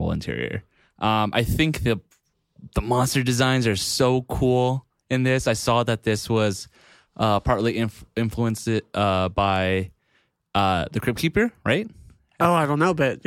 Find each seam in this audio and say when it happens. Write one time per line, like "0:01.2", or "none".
none